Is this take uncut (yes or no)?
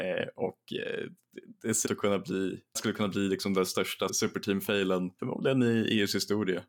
no